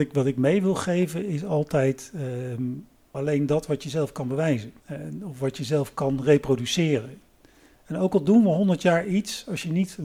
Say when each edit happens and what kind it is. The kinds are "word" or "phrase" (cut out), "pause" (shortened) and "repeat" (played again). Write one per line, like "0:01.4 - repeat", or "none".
0:03.1 - word
0:04.8 - pause

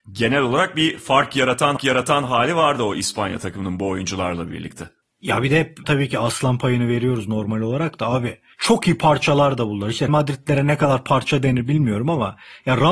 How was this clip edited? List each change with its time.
0:01.8 - repeat
0:05.0 - pause
0:05.8 - word
0:08.5 - pause
0:10.1 - word

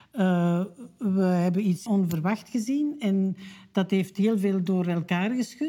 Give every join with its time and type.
0:01.9 - phrase

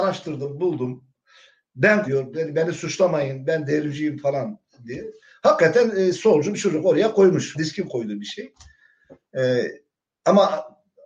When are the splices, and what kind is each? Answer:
0:02.0 - word
0:06.5 - word
0:07.5 - word

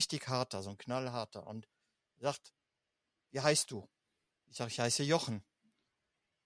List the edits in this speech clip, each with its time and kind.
none

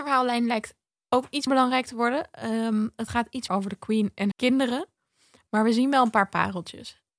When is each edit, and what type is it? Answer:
0:01.5 - word
0:03.5 - word
0:04.3 - word

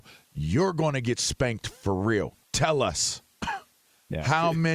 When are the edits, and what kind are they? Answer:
0:02.4 - pause

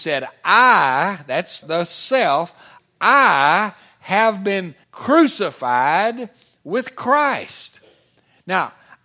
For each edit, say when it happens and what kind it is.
0:01.6 - word
0:04.8 - pause

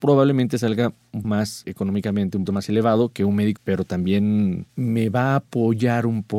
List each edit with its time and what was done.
0:01.2 - word
0:02.5 - word
0:03.6 - word

